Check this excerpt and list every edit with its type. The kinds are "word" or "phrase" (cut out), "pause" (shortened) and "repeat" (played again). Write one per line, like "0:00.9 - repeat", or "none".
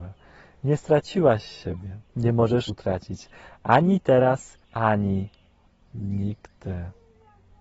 0:02.1 - pause
0:02.7 - word
0:04.6 - pause

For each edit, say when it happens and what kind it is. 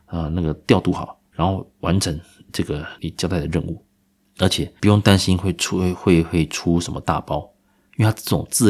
0:01.3 - pause
0:04.1 - pause

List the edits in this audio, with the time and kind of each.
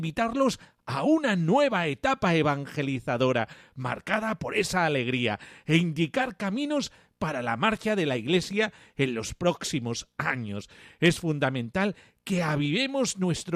none

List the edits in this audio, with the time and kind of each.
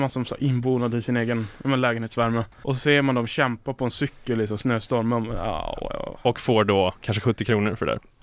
0:02.5 - pause

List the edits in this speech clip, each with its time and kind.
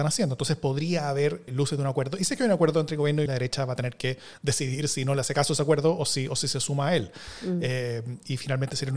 0:01.5 - word
0:03.3 - phrase

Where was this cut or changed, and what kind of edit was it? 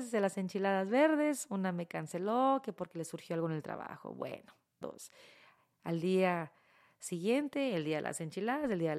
0:04.8 - word

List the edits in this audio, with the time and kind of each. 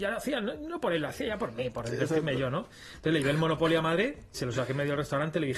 0:04.3 - word

